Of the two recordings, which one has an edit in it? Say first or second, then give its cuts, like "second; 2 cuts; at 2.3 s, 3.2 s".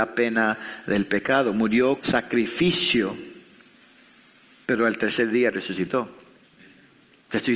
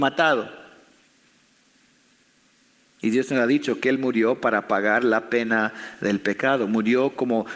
first; 1 cut; at 2.0 s